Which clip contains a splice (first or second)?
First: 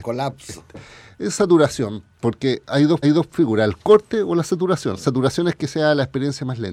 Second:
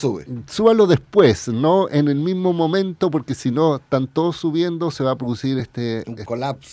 first